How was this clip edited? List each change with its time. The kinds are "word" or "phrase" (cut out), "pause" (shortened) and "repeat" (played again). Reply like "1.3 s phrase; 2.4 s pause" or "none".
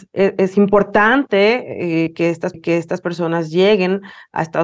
2.5 s repeat